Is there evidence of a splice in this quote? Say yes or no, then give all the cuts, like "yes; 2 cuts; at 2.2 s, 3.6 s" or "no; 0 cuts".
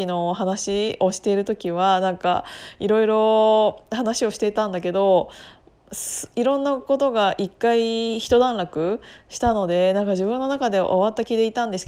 no; 0 cuts